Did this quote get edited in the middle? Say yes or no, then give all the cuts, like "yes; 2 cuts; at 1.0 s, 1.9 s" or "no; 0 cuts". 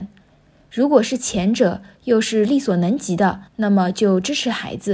yes; 1 cut; at 3.5 s